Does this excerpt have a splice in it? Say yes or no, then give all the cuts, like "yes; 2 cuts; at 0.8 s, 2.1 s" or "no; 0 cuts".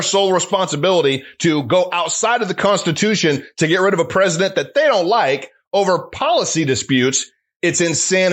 no; 0 cuts